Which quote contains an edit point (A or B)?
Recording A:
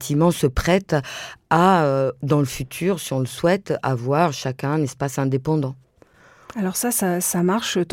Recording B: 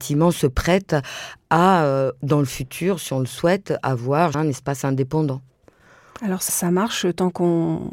B